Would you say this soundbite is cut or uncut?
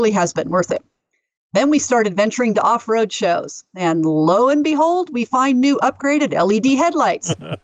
uncut